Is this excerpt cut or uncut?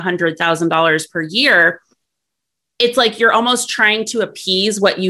uncut